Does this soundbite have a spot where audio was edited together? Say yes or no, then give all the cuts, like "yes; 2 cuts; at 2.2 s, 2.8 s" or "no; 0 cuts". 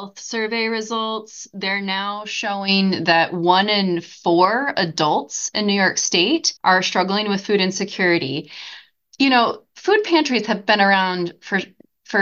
yes; 1 cut; at 6.6 s